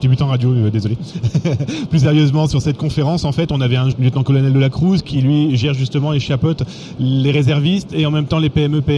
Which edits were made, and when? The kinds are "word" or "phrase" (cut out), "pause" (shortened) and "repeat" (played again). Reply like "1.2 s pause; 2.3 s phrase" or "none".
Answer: 3.9 s word